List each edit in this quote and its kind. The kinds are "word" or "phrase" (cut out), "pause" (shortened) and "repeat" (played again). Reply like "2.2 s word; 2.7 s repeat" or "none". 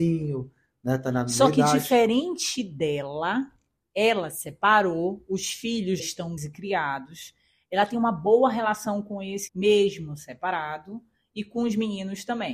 6.0 s word; 6.4 s word; 9.5 s word